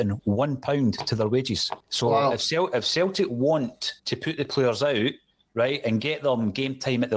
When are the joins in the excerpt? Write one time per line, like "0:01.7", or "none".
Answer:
0:01.8
0:04.0

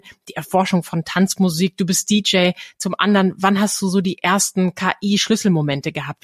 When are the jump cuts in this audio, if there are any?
none

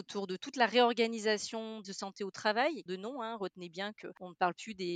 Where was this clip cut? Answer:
0:01.8
0:02.9

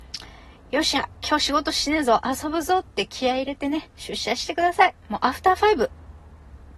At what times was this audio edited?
0:03.9
0:05.0

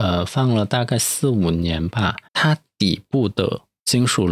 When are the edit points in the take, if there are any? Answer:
0:02.3

